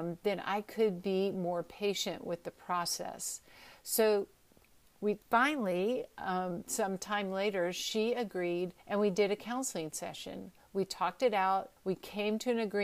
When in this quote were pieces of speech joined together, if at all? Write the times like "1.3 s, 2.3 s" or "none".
5.2 s, 8.8 s, 11.8 s